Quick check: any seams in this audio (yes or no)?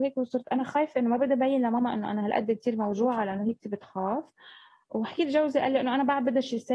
no